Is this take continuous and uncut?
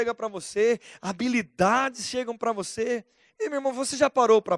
yes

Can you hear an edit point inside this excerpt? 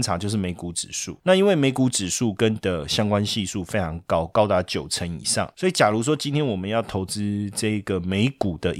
yes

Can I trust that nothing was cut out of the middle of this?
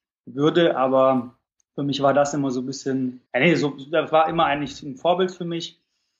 no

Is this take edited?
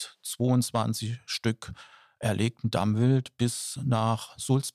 no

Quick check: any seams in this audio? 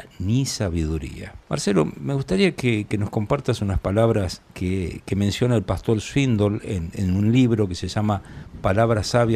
yes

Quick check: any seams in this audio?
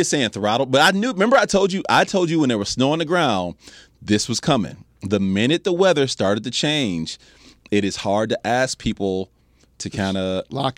no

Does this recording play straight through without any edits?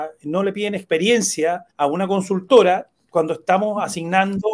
no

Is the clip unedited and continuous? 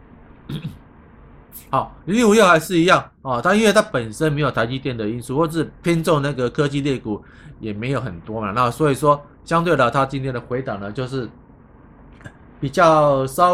no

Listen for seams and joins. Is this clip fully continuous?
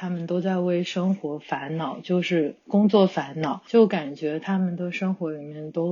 yes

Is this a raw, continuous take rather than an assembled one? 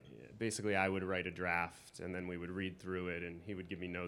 yes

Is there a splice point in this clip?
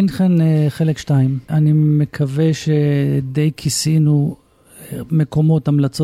no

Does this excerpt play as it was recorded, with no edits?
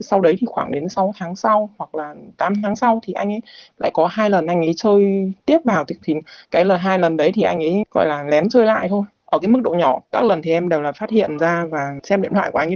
yes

